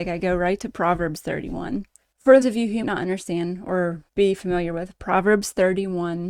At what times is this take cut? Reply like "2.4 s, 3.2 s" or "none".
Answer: 2.4 s, 2.8 s, 4.1 s